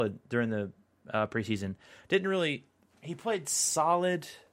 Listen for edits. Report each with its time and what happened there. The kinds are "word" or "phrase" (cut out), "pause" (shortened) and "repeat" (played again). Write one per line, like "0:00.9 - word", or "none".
0:02.9 - word